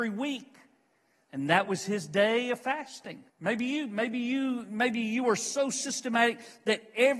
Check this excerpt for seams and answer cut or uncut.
cut